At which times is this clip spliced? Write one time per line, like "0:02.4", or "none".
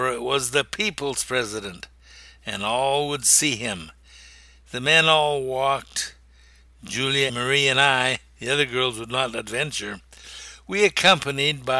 0:07.3